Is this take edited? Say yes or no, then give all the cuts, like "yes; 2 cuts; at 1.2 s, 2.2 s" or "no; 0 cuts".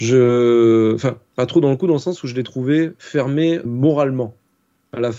yes; 1 cut; at 3.6 s